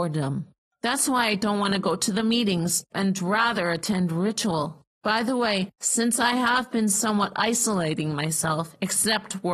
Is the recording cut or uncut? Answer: cut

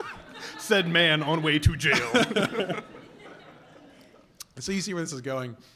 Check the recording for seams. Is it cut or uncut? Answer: uncut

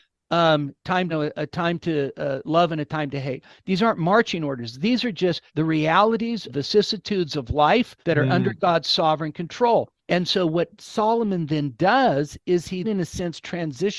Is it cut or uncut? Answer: cut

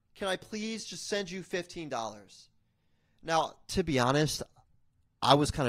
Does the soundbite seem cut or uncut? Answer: uncut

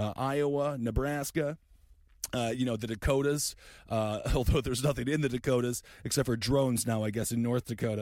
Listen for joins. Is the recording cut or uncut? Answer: uncut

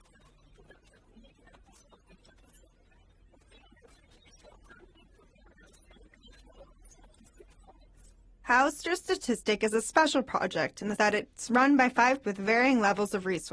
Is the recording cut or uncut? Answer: cut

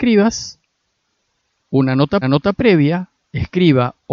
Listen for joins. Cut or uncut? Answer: cut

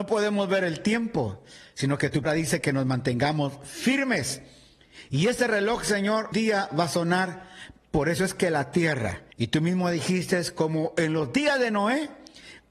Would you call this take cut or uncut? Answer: cut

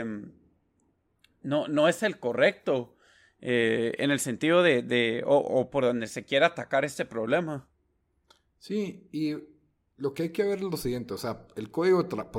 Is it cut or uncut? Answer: uncut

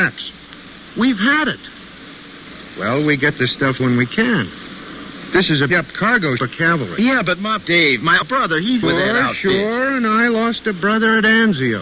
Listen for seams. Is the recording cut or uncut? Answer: cut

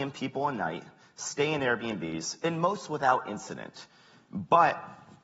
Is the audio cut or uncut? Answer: uncut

